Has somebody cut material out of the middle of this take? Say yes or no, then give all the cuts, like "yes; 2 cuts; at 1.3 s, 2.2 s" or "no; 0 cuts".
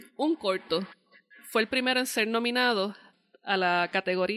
no; 0 cuts